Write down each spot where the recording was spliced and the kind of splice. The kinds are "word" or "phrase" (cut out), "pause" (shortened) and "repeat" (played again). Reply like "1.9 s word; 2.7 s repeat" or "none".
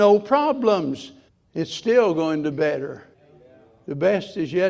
1.3 s pause; 2.5 s word; 3.1 s pause